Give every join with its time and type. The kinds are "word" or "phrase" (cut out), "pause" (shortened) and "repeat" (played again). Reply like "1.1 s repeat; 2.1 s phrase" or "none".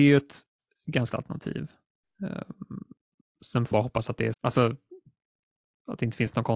1.1 s word; 3.7 s word; 4.3 s word